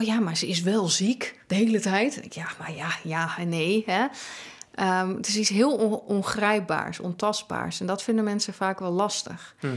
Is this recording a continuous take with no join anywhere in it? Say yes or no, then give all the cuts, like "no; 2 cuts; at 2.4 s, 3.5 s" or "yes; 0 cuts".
yes; 0 cuts